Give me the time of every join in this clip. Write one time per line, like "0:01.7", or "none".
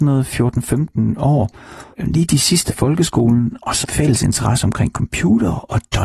0:01.9
0:02.7
0:03.8